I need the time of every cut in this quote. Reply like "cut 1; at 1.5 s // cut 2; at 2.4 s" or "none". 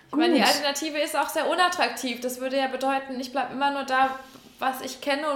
none